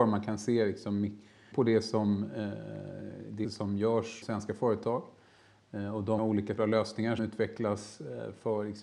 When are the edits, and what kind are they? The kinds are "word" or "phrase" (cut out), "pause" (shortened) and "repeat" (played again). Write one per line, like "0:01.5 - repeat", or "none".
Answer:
0:01.5 - word
0:03.4 - word
0:04.2 - word
0:06.2 - word
0:06.6 - word
0:07.2 - word